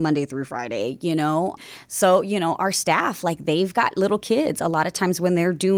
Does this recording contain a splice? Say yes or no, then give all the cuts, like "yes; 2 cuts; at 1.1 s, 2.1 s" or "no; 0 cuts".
no; 0 cuts